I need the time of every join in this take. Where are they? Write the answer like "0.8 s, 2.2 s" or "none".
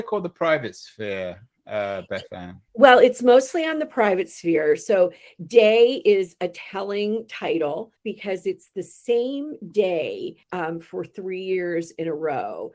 2.7 s, 8.0 s, 10.4 s